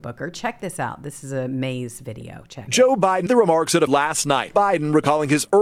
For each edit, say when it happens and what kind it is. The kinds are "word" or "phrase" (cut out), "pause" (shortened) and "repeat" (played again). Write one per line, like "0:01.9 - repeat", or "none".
0:03.3 - word
0:03.9 - word